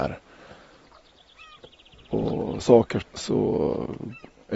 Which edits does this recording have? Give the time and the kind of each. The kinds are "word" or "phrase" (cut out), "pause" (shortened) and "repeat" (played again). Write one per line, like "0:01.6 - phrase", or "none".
0:02.6 - word
0:03.0 - word